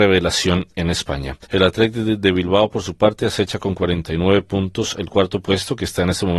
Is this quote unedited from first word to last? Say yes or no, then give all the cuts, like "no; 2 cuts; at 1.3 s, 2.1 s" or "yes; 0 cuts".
no; 1 cut; at 1.4 s